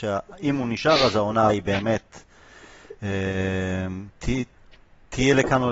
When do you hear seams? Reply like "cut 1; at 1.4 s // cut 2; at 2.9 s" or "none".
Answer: cut 1; at 1.5 s // cut 2; at 4.1 s